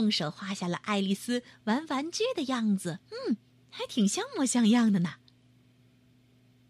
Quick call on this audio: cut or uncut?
cut